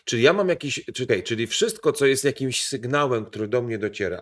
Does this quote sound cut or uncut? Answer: cut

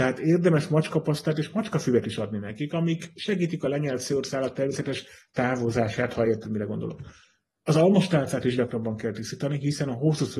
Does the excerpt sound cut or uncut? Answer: uncut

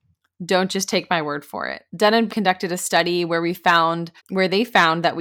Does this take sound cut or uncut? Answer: cut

